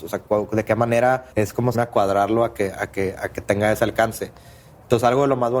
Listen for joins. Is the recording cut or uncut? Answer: cut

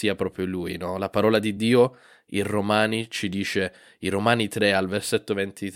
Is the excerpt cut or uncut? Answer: uncut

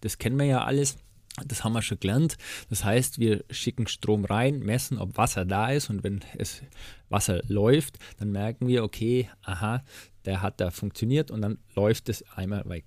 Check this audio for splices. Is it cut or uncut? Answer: uncut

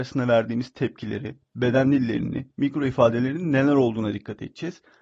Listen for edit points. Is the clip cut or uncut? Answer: uncut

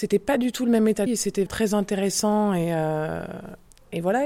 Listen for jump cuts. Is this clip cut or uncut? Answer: cut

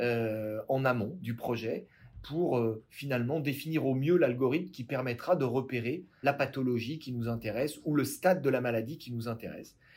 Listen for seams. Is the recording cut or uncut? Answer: cut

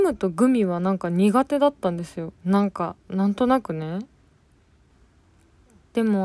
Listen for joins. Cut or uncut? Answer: cut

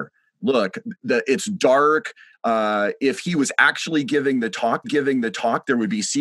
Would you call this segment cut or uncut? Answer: cut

